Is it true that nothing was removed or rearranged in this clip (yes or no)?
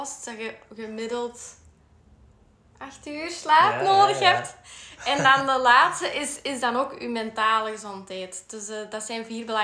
yes